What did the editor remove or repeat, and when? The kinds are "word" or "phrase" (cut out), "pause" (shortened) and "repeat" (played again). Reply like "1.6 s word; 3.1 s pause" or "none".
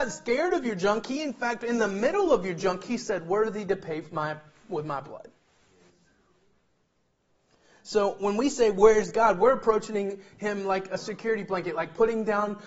none